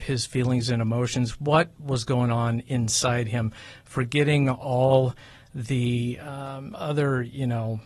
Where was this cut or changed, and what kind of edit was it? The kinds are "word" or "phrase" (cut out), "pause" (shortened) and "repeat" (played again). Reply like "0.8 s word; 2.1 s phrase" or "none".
none